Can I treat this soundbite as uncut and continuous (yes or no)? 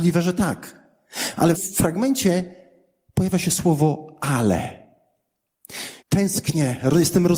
no